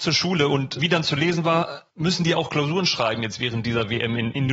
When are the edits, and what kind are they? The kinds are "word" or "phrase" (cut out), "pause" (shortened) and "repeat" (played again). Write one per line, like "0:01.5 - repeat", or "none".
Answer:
0:01.9 - pause